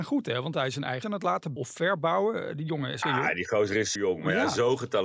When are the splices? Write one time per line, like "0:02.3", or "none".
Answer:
0:01.0
0:01.6
0:03.0
0:04.0

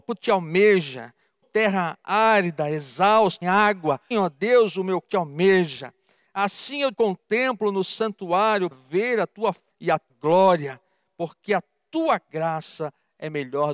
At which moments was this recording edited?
0:01.4
0:03.4
0:04.1
0:05.0
0:06.9
0:08.7
0:09.7
0:10.1

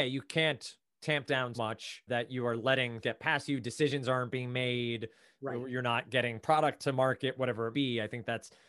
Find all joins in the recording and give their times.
0:01.5
0:02.1
0:03.0
0:06.8
0:07.7

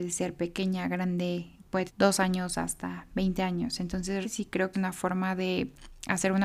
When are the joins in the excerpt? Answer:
0:01.9
0:04.2
0:04.7

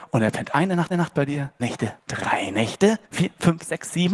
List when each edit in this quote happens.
0:00.9
0:01.6
0:02.0
0:03.0

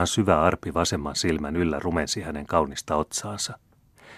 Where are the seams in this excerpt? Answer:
none

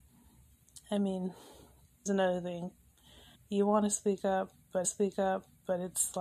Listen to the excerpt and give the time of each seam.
0:02.1
0:03.4
0:04.8

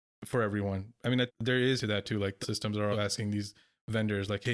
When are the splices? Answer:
0:01.3
0:01.8
0:02.4
0:02.9

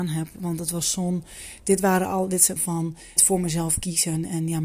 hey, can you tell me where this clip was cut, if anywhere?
0:02.6
0:03.2

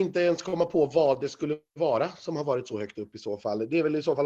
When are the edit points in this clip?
none

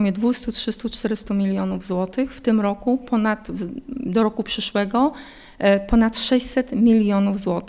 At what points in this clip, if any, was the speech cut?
none

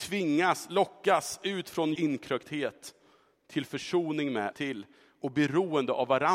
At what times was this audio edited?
0:02.0
0:04.5

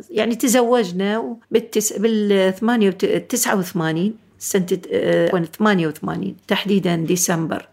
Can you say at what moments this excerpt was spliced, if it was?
0:01.4
0:05.3
0:06.4

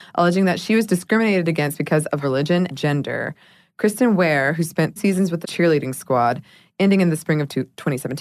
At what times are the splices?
0:02.2
0:02.7
0:05.0
0:05.4

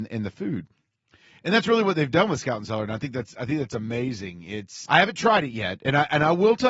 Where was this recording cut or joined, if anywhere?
0:04.9

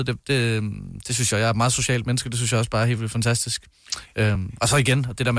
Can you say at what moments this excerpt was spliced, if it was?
none

